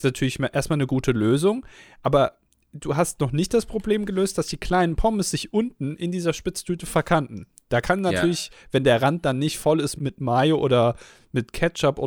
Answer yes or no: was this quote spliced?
yes